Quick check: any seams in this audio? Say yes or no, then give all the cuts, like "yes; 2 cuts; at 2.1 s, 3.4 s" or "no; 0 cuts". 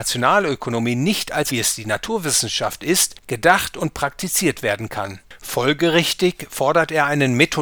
yes; 1 cut; at 1.5 s